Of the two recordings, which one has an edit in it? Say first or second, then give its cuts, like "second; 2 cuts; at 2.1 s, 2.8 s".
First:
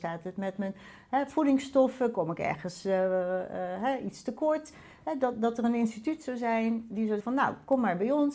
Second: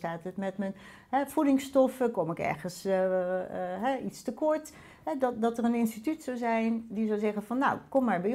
first; 1 cut; at 7.2 s